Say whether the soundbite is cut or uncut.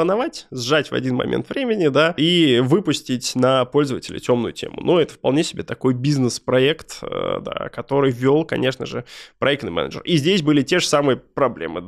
uncut